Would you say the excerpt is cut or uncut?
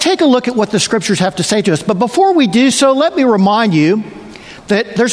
uncut